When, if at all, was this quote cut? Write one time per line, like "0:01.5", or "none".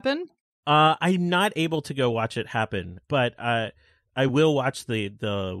none